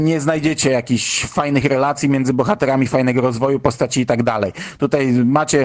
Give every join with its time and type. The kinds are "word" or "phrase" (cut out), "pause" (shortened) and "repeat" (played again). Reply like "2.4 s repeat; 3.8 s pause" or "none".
none